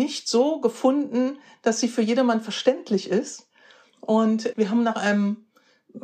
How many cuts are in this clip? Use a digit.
0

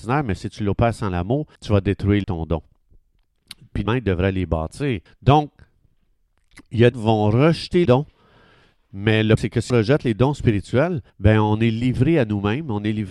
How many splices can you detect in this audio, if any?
9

